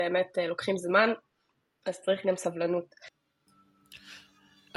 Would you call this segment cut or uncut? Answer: uncut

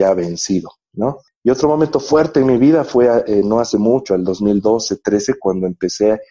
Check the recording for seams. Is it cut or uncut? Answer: uncut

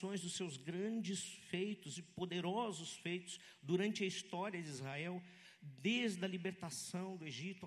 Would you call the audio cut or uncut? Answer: uncut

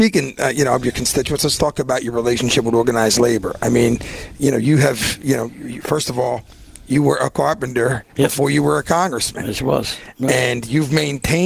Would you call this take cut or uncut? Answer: cut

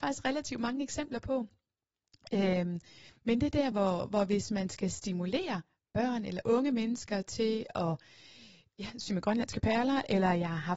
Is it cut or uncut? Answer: uncut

